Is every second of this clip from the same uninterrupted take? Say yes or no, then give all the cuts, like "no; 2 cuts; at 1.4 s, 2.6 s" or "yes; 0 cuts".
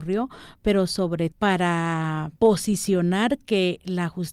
no; 2 cuts; at 1.3 s, 2.4 s